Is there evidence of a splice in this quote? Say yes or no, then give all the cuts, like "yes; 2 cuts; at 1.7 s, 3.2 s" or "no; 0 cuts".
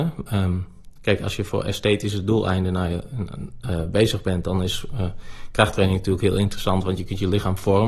no; 0 cuts